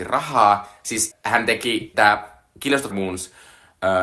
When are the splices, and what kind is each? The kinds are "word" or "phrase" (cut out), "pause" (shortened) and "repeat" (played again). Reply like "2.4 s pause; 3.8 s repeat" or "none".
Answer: 1.1 s word; 1.9 s word; 2.9 s word